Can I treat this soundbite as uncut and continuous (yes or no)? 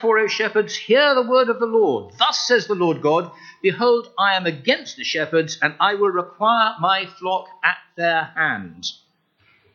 yes